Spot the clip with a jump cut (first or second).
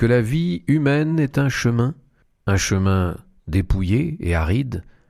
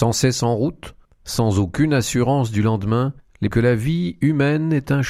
second